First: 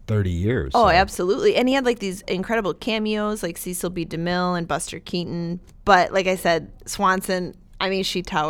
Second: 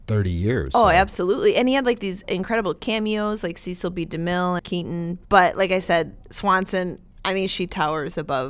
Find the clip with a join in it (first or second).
second